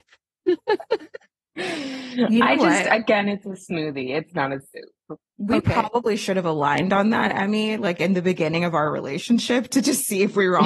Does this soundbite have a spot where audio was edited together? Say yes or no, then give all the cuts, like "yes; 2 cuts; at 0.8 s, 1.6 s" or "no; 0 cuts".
yes; 1 cut; at 5.3 s